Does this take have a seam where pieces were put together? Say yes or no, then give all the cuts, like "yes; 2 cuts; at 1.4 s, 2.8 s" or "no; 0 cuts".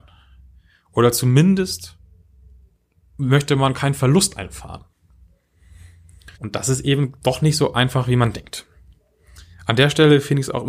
yes; 1 cut; at 6.3 s